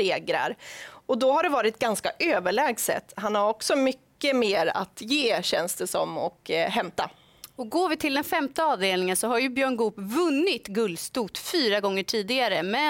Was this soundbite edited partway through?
no; 0 cuts

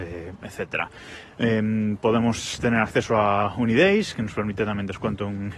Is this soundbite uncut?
yes; 0 cuts

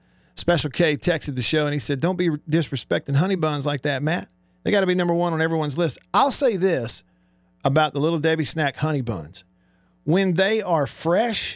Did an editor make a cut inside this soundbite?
no; 0 cuts

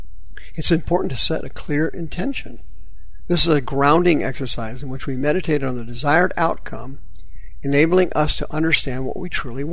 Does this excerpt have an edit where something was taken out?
no; 0 cuts

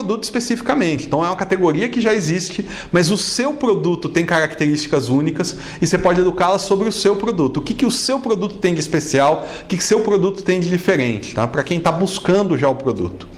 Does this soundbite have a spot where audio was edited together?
no; 0 cuts

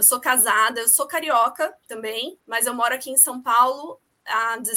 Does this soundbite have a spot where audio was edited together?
yes; 1 cut; at 2.4 s

